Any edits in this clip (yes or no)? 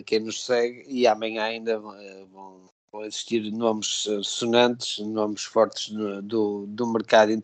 no